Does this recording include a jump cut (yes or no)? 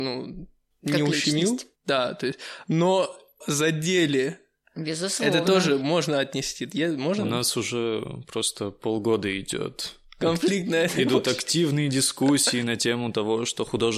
yes